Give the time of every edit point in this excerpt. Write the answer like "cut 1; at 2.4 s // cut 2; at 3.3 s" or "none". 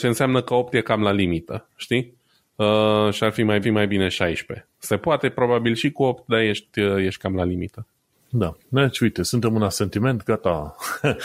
cut 1; at 3.6 s